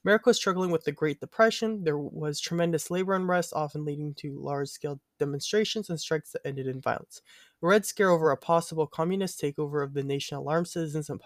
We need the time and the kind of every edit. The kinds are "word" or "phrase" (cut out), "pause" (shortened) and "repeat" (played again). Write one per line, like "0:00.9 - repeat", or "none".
none

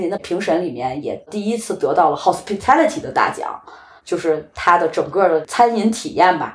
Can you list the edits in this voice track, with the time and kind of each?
none

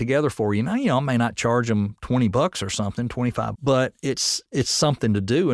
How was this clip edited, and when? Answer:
0:03.5 - phrase

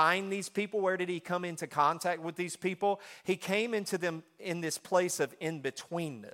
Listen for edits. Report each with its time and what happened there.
none

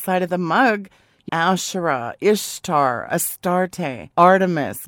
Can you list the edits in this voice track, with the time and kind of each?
0:01.3 - word

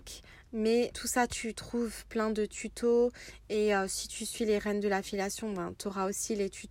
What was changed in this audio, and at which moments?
0:00.9 - word

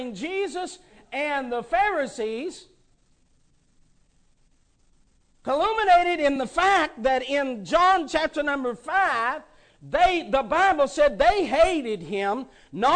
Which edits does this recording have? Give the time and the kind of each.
none

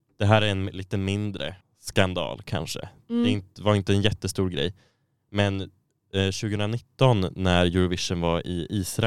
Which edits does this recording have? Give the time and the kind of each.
0:01.6 - pause

